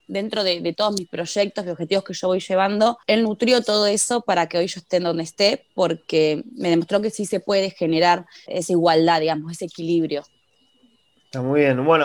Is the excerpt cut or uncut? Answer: cut